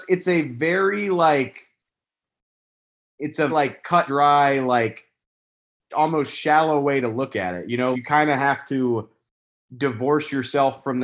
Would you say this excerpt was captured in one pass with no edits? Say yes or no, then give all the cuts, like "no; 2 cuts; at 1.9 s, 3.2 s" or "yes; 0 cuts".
no; 4 cuts; at 3.5 s, 4.1 s, 5.9 s, 7.9 s